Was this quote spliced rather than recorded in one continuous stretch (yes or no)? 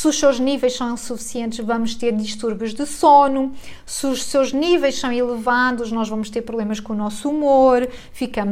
no